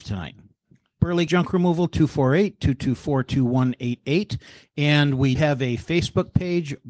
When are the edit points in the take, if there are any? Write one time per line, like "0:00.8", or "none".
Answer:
0:01.3
0:05.4